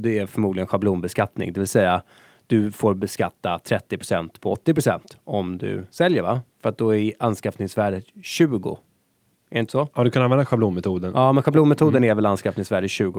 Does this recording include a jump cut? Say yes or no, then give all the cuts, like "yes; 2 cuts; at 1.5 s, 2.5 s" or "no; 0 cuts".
no; 0 cuts